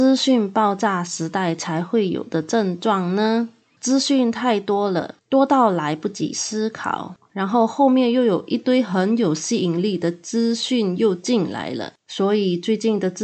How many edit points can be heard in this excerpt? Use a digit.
1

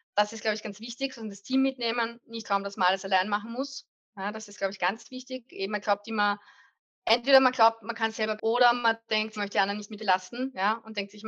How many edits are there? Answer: 4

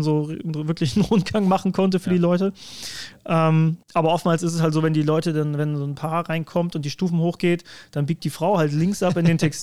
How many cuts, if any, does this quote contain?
1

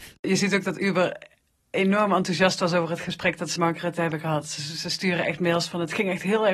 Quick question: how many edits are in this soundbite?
1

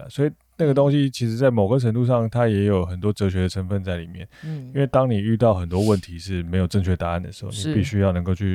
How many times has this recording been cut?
1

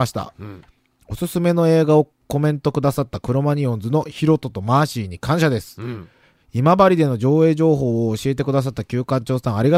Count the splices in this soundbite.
0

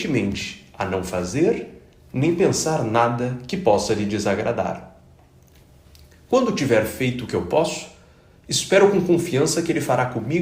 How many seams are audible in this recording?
0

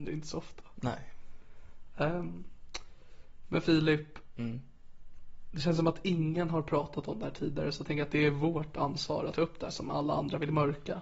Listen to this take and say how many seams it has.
1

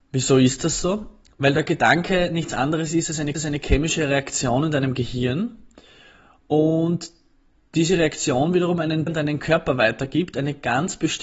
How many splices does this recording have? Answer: 2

